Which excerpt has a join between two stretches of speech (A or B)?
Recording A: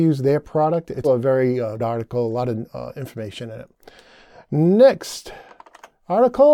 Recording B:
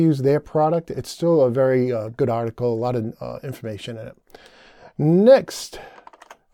A